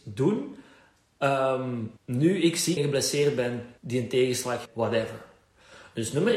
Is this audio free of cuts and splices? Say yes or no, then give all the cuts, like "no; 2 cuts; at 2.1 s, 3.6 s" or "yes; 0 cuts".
no; 4 cuts; at 2.0 s, 2.8 s, 3.8 s, 4.7 s